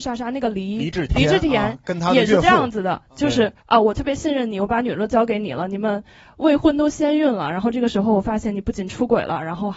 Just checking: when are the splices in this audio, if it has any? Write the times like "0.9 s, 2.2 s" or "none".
1.1 s, 3.6 s